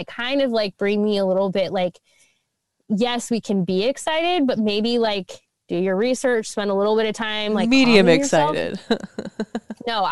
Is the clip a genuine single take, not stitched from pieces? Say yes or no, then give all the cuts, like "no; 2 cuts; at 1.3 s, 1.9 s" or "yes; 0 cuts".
yes; 0 cuts